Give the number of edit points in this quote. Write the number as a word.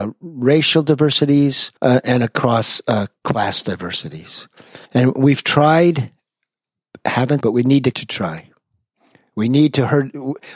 four